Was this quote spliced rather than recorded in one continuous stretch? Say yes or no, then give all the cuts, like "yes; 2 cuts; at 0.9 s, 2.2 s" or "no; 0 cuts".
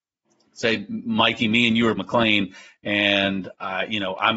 yes; 1 cut; at 2.0 s